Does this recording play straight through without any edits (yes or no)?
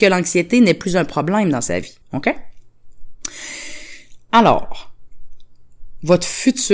no